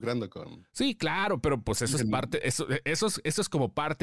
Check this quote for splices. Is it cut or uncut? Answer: uncut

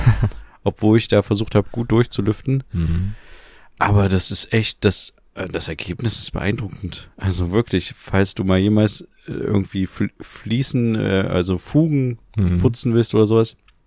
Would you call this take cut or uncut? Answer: uncut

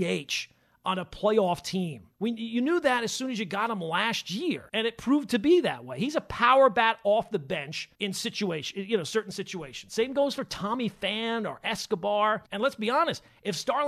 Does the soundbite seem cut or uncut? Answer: cut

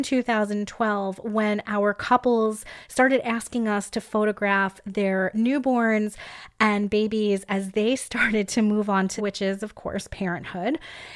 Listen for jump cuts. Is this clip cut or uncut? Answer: cut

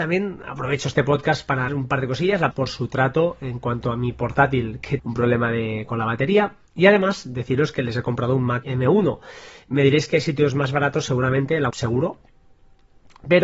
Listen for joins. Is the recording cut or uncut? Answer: cut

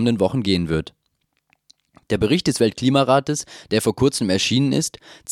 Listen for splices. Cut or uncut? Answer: uncut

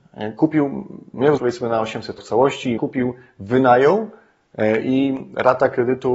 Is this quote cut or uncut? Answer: cut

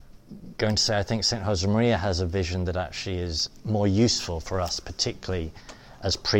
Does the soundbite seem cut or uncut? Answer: uncut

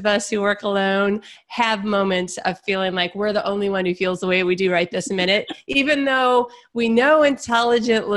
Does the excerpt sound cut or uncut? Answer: uncut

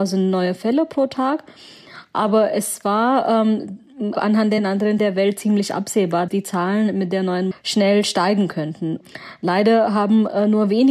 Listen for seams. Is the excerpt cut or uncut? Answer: cut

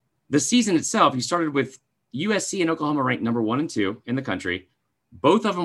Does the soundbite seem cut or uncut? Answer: uncut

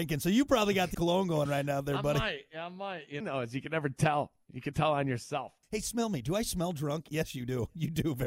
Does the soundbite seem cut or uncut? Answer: cut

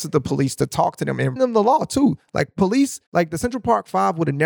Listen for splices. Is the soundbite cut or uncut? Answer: cut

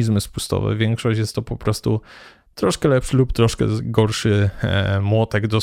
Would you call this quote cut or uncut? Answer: uncut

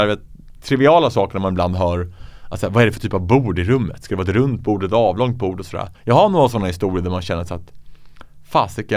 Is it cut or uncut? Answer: cut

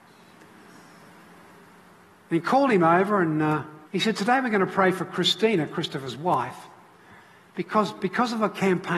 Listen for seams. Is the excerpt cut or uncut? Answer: cut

